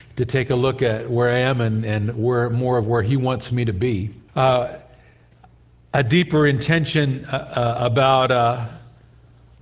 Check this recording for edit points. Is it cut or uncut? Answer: cut